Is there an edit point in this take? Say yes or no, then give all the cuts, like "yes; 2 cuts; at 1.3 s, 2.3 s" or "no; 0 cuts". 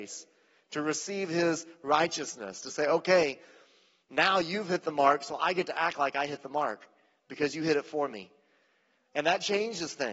no; 0 cuts